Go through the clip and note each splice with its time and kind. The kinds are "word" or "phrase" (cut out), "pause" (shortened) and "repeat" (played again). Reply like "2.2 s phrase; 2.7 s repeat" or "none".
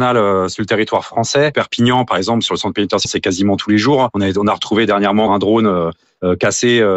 3.0 s phrase; 5.3 s word